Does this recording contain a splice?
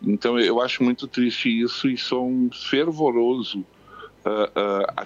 no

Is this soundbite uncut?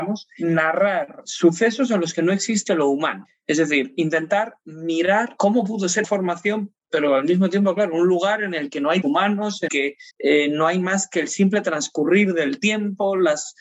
no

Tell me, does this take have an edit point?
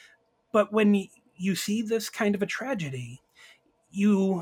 no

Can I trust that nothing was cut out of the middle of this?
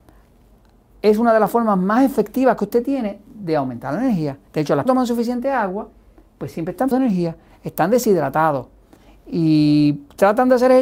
no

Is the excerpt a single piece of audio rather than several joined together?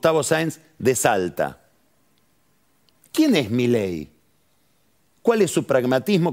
yes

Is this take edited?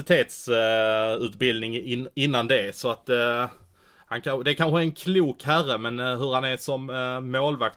no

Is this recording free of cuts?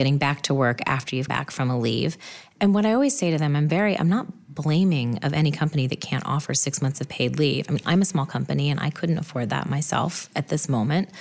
no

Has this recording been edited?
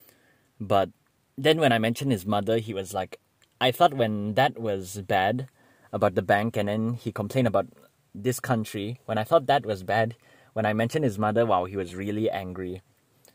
no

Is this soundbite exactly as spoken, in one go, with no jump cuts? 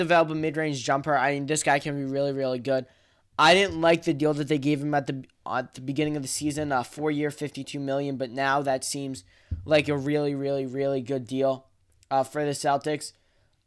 yes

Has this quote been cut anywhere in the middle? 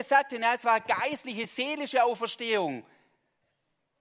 no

